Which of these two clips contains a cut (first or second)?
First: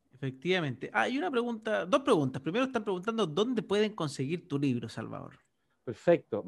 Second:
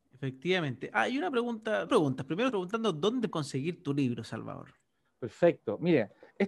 second